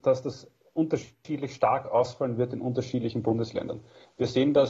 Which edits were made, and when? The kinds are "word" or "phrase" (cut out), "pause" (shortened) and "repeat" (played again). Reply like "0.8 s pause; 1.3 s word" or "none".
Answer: none

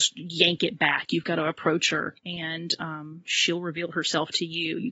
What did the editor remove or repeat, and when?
2.2 s pause

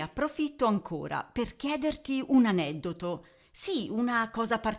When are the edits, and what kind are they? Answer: none

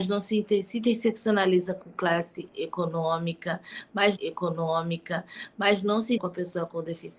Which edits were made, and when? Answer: 4.2 s repeat; 6.2 s word

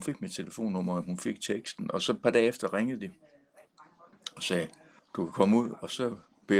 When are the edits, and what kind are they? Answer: 5.0 s pause

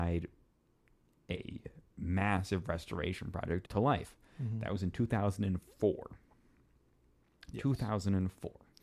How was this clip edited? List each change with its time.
3.6 s phrase

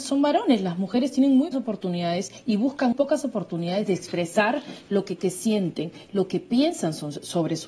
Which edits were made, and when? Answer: 1.5 s word; 2.9 s word; 5.2 s phrase

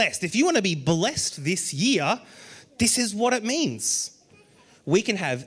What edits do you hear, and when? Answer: none

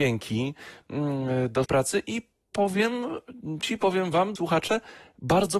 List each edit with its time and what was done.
1.6 s word; 3.6 s word; 4.4 s word

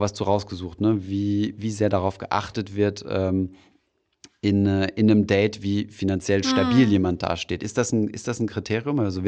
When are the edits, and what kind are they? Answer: none

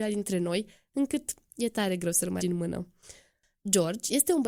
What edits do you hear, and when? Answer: 2.4 s word

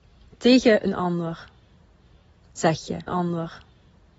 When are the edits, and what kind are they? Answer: 3.1 s repeat

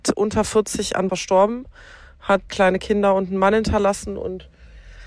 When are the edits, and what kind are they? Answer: 1.1 s word; 2.5 s word

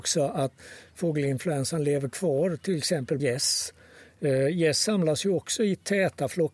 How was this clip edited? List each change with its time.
3.2 s word

